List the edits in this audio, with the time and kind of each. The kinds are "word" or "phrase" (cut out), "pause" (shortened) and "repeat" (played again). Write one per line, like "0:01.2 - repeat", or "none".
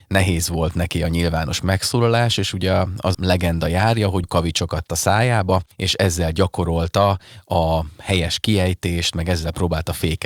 0:03.1 - word
0:04.2 - word
0:04.9 - word
0:05.7 - pause